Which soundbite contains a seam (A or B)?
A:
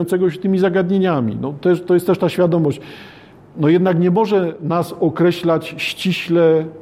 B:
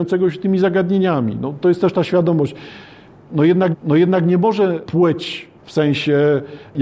B